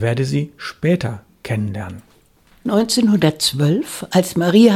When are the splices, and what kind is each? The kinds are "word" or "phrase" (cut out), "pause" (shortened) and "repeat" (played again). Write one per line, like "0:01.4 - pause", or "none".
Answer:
none